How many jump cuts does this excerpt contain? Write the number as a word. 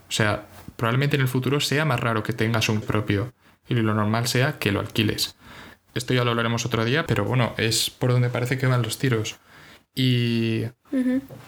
two